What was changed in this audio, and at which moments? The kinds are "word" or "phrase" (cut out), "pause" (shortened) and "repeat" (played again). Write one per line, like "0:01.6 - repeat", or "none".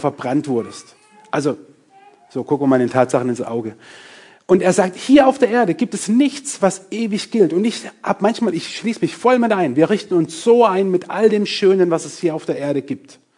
none